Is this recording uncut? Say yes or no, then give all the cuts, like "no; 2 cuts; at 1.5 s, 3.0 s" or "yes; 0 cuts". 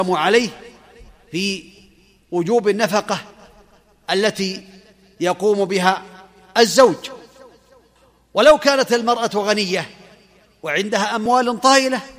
yes; 0 cuts